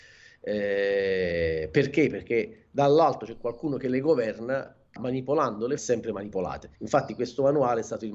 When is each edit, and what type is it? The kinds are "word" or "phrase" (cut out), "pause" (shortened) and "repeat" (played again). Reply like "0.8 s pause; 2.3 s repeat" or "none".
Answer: 5.0 s word; 5.8 s phrase; 6.7 s pause